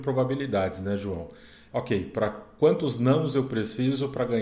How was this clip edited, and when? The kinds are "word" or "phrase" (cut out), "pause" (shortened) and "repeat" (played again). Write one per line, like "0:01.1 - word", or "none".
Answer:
0:01.7 - phrase